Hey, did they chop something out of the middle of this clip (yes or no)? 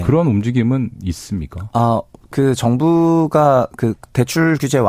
no